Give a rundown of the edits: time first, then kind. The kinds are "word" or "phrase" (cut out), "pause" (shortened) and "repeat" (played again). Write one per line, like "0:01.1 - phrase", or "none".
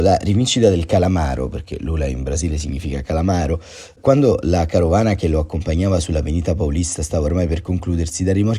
none